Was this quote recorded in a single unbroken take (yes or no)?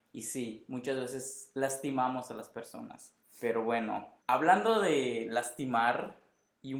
no